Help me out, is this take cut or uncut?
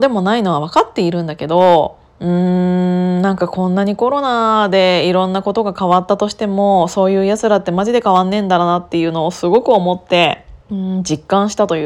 cut